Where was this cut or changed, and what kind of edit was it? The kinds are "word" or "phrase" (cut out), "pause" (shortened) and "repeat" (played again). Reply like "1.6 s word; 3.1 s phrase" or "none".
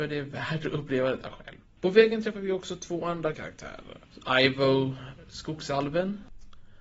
1.6 s pause; 3.3 s phrase